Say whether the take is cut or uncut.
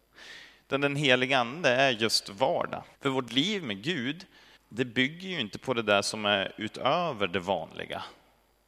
cut